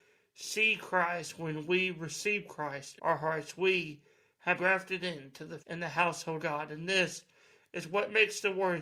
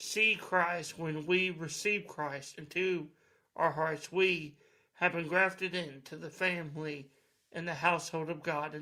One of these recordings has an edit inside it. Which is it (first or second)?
first